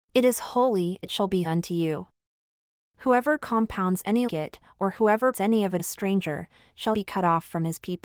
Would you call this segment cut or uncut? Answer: cut